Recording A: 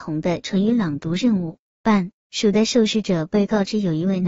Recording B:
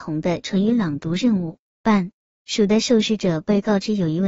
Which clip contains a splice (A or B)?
A